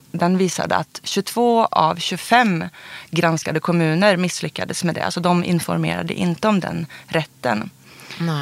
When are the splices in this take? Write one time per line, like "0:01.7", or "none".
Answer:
none